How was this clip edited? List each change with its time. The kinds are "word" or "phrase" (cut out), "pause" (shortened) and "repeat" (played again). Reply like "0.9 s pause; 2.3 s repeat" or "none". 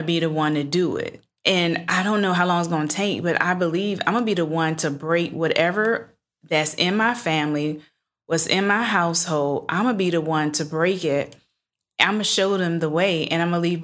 none